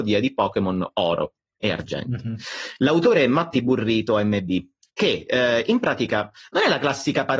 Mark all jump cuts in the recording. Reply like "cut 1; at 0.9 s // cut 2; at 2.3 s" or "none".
none